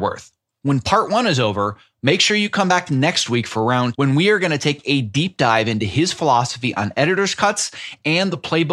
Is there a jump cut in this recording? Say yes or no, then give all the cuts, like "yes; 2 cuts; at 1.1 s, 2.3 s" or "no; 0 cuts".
yes; 1 cut; at 3.9 s